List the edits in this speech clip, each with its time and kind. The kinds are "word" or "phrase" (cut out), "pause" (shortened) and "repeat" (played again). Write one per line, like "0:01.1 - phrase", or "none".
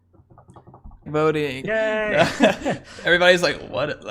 0:01.1 - word
0:01.6 - word